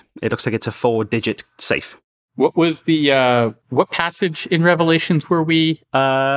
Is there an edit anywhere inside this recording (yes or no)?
no